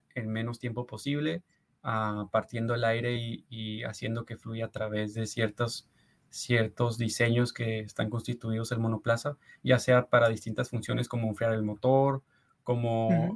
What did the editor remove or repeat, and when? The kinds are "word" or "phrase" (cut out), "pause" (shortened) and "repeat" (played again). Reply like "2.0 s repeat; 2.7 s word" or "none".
none